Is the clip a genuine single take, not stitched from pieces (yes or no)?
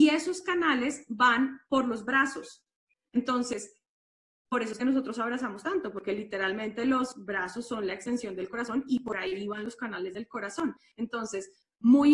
yes